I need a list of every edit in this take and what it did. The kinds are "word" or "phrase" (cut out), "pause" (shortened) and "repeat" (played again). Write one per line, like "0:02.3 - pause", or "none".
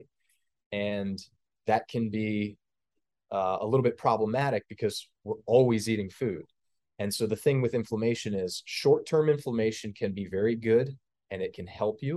none